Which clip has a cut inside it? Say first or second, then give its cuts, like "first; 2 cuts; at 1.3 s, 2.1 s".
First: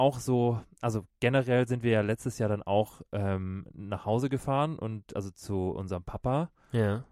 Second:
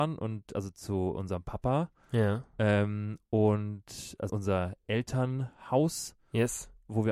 second; 1 cut; at 4.3 s